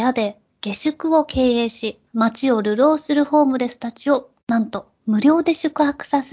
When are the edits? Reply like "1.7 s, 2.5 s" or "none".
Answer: 2.1 s, 4.4 s